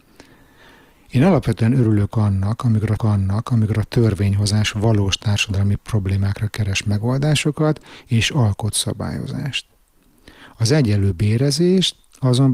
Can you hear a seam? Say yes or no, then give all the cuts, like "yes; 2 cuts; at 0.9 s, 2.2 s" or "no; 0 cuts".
yes; 1 cut; at 3.0 s